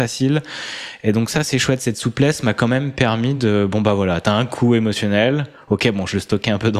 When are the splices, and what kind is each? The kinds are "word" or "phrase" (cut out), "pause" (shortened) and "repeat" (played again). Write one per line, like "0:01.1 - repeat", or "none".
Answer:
none